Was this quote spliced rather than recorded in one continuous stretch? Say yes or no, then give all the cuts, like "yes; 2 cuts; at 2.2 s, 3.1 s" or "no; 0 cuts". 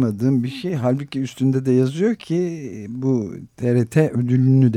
no; 0 cuts